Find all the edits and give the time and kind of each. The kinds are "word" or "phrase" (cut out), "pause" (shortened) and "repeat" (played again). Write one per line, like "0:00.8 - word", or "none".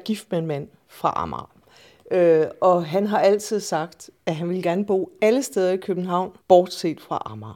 0:06.4 - pause